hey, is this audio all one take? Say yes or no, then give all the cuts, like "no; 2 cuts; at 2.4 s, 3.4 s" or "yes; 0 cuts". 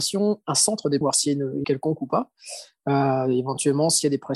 no; 2 cuts; at 1.0 s, 1.6 s